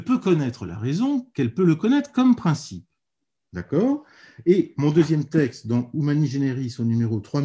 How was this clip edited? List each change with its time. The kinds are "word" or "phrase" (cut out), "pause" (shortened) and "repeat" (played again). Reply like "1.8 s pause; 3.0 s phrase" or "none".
none